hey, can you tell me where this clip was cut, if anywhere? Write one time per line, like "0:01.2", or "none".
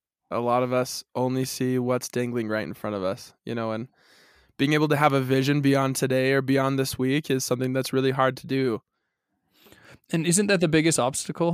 none